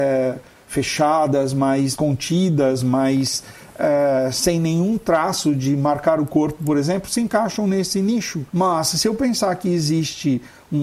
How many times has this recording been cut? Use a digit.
2